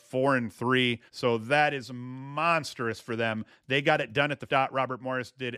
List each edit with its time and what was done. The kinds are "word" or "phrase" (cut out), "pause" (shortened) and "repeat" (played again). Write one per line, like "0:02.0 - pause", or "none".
0:01.1 - pause
0:04.5 - word